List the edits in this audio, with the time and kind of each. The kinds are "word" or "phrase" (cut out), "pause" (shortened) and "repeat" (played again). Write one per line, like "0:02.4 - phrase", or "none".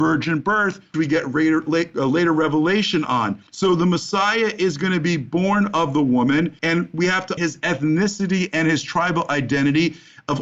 0:00.9 - word
0:03.5 - pause
0:06.6 - pause
0:07.4 - word